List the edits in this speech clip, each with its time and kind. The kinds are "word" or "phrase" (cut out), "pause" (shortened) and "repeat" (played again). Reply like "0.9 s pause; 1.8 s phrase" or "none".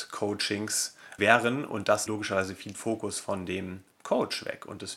1.2 s word; 2.1 s word; 2.7 s phrase